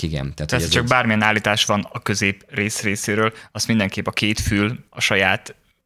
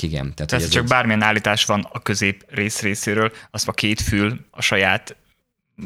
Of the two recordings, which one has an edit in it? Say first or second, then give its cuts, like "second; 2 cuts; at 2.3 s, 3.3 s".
second; 1 cut; at 3.7 s